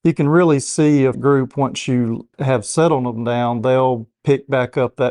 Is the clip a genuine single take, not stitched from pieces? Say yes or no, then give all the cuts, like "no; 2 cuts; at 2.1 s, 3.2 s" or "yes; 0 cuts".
no; 2 cuts; at 1.1 s, 2.3 s